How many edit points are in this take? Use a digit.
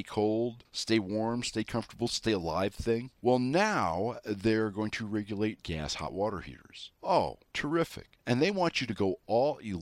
0